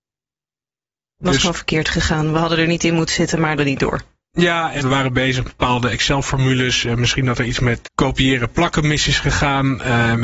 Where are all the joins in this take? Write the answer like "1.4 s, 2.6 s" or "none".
3.6 s, 4.3 s, 4.8 s, 5.5 s, 7.8 s

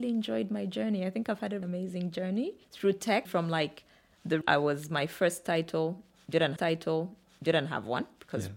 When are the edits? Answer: 1.6 s, 2.6 s, 3.2 s, 4.4 s, 6.6 s

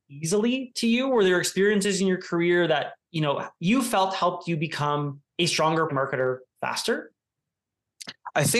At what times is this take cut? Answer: 5.3 s, 5.9 s

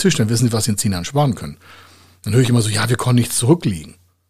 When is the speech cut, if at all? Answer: none

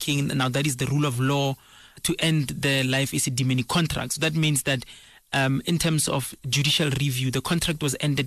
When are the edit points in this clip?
none

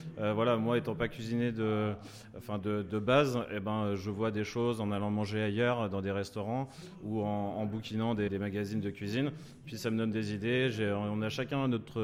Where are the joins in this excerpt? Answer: 8.3 s

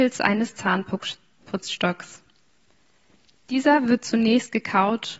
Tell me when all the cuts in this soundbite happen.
none

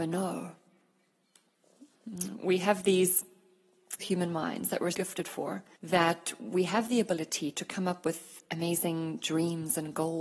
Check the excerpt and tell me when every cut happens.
4.0 s, 4.9 s, 5.7 s

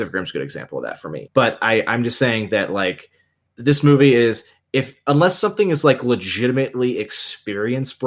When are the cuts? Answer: 3.4 s

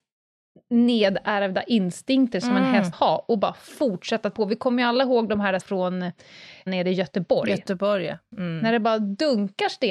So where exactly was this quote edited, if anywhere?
2.9 s, 4.3 s, 5.6 s, 6.7 s

